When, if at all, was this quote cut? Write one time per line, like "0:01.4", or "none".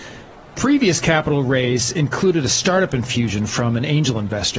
none